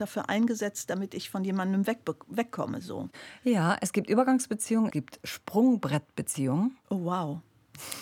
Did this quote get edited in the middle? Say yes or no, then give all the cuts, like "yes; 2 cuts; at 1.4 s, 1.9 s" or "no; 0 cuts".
yes; 1 cut; at 4.9 s